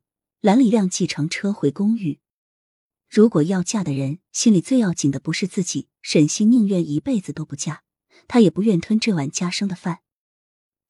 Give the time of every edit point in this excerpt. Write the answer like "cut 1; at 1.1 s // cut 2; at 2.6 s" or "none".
cut 1; at 4.3 s // cut 2; at 5.9 s